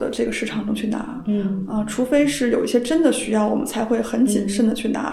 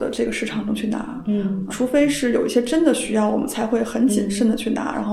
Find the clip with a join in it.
second; 1 cut; at 1.7 s

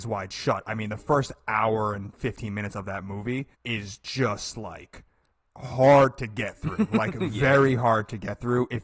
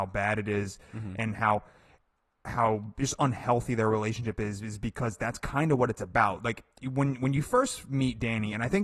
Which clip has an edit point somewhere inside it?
first; 2 cuts; at 3.5 s, 5.3 s

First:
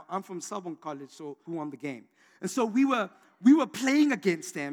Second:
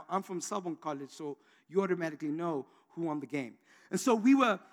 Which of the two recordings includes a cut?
first; 1 cut; at 1.5 s

